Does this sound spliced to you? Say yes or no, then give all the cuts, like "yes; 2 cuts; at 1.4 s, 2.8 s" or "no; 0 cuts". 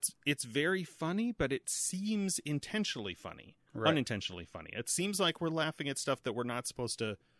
yes; 1 cut; at 3.7 s